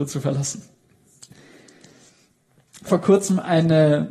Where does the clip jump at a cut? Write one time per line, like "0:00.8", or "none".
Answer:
0:02.9